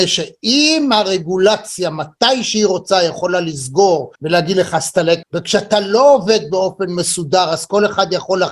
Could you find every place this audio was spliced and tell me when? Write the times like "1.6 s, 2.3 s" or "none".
4.2 s, 5.2 s